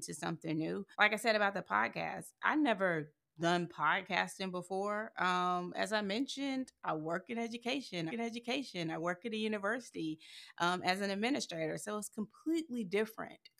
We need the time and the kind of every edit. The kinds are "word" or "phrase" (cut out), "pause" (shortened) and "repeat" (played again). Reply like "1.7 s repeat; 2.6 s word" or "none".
0.9 s pause; 8.1 s repeat